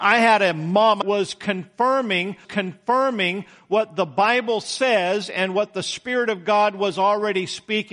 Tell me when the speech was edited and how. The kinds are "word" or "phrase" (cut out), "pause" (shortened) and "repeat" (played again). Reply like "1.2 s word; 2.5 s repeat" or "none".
1.0 s phrase; 2.4 s repeat